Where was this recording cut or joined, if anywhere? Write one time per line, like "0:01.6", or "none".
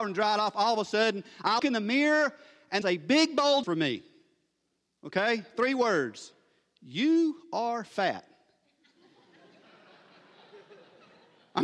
0:01.6
0:02.8
0:03.6